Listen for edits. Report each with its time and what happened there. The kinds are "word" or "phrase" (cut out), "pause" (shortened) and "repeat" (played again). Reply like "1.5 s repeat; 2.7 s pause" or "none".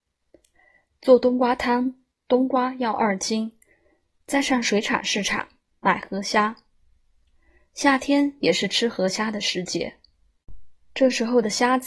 none